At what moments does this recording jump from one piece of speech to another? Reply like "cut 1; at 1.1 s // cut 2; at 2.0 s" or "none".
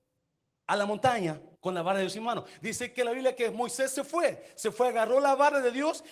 cut 1; at 1.5 s